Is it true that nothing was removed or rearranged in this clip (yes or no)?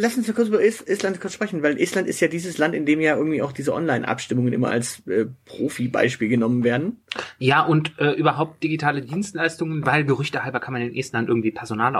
yes